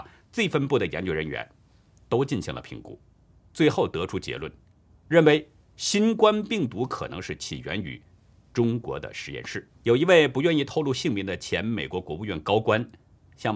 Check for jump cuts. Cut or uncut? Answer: cut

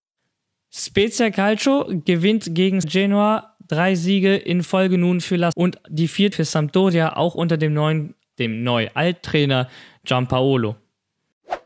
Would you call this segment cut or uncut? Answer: cut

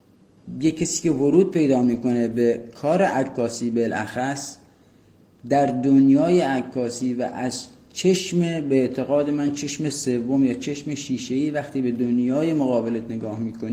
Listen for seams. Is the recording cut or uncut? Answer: uncut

